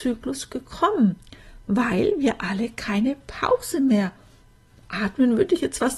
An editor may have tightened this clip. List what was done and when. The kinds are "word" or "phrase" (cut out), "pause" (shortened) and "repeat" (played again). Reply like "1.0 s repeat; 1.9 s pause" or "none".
none